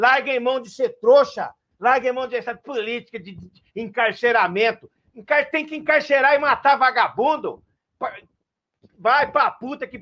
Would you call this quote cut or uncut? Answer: uncut